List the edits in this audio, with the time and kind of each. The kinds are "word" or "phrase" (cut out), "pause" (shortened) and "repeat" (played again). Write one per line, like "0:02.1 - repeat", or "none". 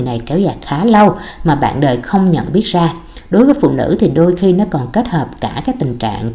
none